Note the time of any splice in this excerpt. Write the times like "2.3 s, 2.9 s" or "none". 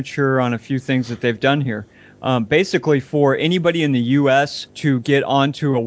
none